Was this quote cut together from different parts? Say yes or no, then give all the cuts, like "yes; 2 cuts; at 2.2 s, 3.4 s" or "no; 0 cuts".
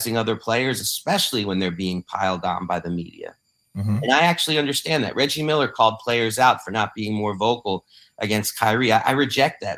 no; 0 cuts